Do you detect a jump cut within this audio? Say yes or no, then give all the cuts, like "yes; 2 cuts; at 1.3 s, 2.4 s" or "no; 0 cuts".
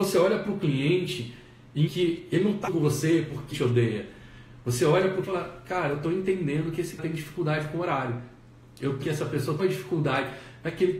yes; 7 cuts; at 1.9 s, 2.7 s, 3.5 s, 5.2 s, 7.0 s, 9.0 s, 9.6 s